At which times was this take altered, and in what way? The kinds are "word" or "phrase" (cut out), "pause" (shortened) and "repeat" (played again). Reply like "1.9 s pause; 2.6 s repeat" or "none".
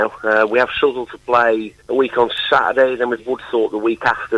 1.8 s pause; 3.2 s word